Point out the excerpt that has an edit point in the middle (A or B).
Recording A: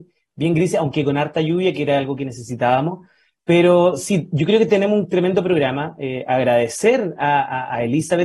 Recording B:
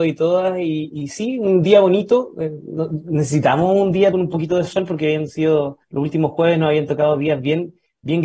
B